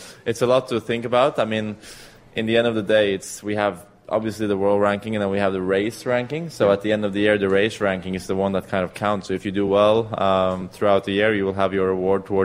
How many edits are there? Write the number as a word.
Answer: zero